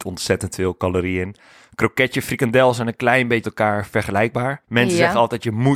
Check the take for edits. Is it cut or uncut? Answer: cut